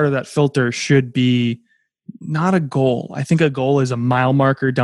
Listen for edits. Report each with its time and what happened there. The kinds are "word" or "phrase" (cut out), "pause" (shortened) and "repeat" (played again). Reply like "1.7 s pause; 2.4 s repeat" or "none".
none